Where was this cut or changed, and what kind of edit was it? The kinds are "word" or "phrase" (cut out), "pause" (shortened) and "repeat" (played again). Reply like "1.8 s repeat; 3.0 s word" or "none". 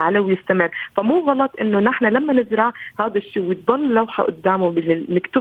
none

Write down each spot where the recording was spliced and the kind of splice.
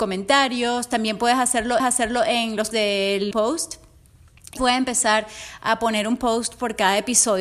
1.8 s repeat; 2.7 s word; 3.3 s word; 4.6 s word

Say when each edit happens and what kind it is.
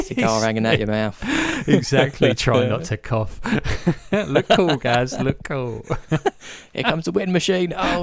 none

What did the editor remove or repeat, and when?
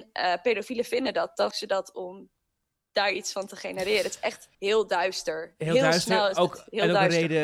1.5 s word; 4.5 s pause

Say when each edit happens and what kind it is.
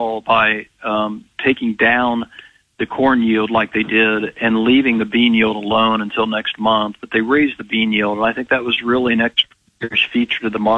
none

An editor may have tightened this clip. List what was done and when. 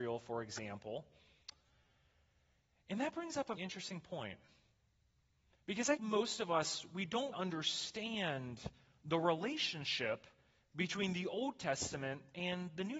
3.6 s word; 6.0 s word; 7.3 s word

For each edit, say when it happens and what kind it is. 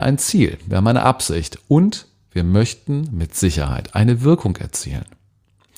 none

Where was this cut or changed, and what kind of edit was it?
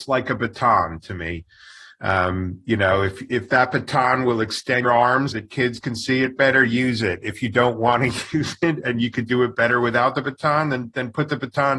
4.8 s word; 5.3 s word; 8.8 s word

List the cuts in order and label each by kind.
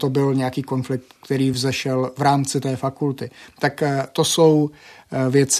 none

